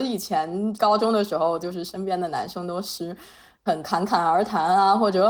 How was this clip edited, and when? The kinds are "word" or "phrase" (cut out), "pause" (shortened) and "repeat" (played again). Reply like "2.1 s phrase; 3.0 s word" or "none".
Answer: none